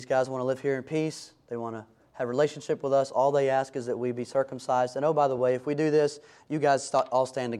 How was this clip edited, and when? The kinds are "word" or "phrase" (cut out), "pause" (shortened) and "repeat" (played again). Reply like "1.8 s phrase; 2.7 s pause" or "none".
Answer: none